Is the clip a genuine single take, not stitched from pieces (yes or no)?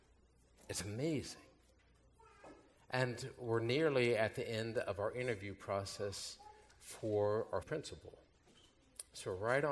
no